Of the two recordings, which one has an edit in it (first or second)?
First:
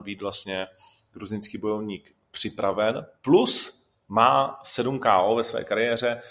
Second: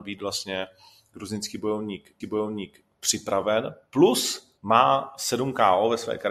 second